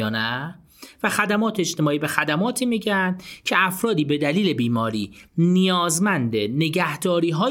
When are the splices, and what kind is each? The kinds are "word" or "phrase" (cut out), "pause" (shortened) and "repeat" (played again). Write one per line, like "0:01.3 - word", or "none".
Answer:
none